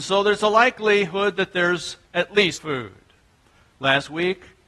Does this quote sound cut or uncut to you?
cut